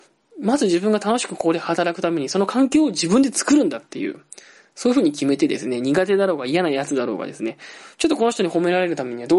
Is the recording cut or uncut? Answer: uncut